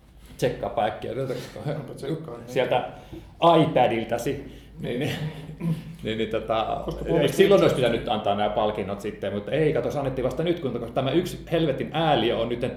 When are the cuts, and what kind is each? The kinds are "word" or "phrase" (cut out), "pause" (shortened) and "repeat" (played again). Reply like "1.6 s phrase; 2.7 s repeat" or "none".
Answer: none